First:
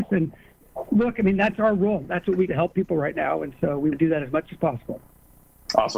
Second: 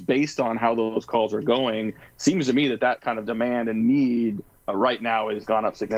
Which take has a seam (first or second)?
first